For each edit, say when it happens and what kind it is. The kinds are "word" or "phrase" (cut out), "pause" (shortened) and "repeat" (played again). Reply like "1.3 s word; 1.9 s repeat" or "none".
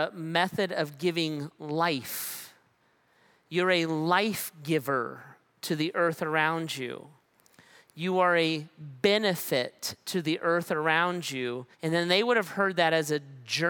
11.7 s pause